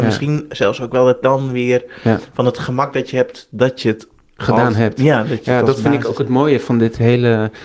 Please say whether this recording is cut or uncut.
cut